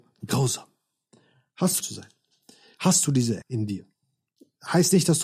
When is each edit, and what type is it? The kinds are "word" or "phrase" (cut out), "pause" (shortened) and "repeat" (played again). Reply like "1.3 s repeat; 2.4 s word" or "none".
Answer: 1.8 s phrase; 3.4 s word